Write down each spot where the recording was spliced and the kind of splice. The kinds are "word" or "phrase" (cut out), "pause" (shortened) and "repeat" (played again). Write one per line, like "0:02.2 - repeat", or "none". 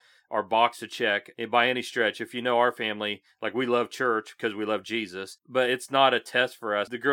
none

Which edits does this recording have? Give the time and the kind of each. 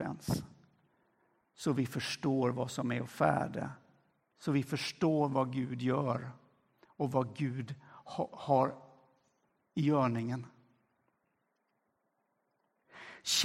none

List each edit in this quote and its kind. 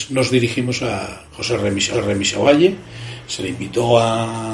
0:01.3 - pause
0:01.9 - repeat

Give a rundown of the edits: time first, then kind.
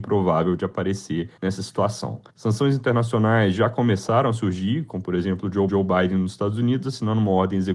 0:01.4 - pause
0:02.3 - pause
0:05.7 - repeat

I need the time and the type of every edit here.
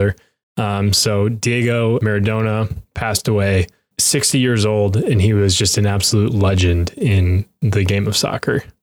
0:03.9 - word

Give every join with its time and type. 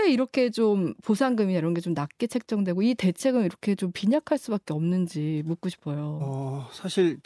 none

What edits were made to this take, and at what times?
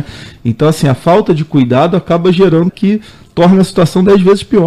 0:02.7 - phrase

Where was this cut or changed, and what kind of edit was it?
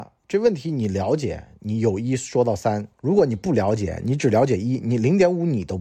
0:02.9 - pause

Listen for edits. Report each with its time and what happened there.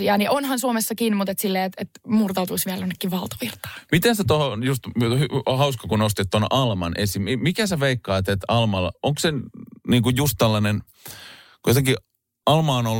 none

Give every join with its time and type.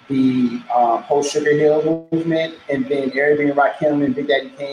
none

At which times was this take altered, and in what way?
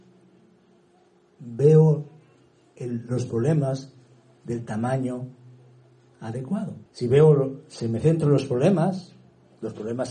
0:06.9 - pause

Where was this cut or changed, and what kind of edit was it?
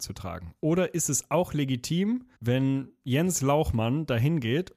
0:02.4 - pause

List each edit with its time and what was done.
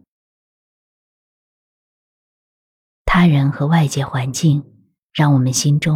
0:04.9 - pause

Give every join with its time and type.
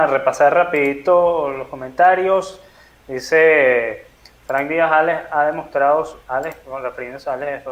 none

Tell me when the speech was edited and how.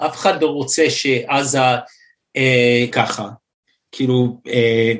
0:02.9 - word

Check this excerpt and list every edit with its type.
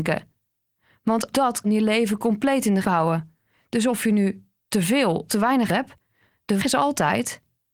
0:01.3 - word
0:01.6 - word
0:02.8 - word
0:05.3 - word
0:05.7 - word
0:06.6 - word

